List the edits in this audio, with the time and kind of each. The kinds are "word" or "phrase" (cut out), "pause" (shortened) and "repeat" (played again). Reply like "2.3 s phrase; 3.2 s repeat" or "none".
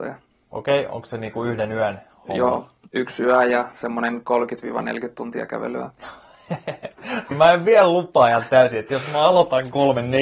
7.3 s word